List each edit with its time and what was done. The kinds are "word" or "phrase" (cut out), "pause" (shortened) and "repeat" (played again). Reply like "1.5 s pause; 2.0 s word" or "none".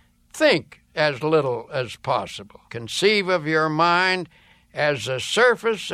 2.7 s pause